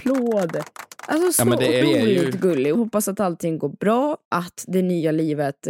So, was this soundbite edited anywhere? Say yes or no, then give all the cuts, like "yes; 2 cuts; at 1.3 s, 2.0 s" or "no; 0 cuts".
yes; 3 cuts; at 1.8 s, 2.7 s, 4.2 s